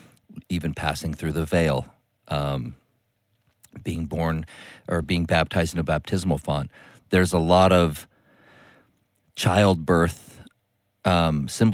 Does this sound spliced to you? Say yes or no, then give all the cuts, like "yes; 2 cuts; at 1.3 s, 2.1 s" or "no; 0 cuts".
no; 0 cuts